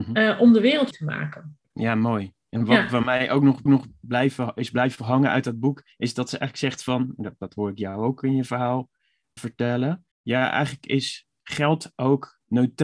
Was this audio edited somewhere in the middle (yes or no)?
yes